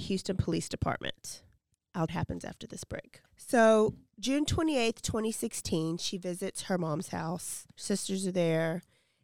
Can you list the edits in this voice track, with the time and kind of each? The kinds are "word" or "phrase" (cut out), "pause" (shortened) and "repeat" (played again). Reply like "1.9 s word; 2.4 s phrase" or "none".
2.1 s phrase; 7.7 s pause